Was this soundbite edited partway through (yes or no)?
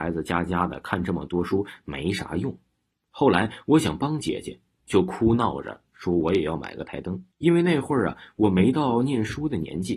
yes